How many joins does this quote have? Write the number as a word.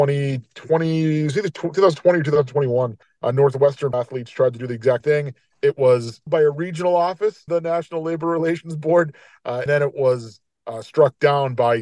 five